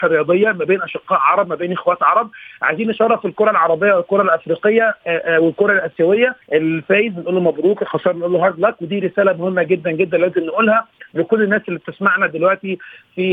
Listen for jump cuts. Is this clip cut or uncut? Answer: cut